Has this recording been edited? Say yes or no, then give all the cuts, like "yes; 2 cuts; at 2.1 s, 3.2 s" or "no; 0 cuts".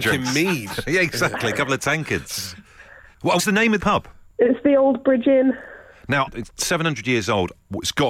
yes; 3 cuts; at 3.4 s, 3.8 s, 6.3 s